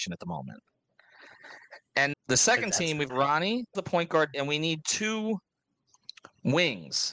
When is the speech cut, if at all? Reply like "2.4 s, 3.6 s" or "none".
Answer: 2.1 s, 3.1 s, 3.7 s, 4.3 s